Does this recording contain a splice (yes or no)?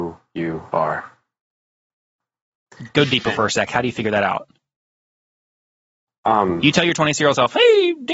no